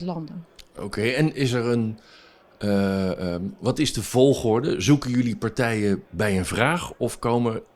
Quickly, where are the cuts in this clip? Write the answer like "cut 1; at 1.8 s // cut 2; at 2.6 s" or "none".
cut 1; at 6.1 s